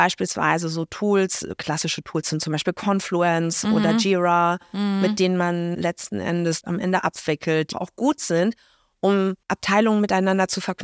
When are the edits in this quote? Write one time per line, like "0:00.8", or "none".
0:05.7
0:06.6
0:07.7
0:09.4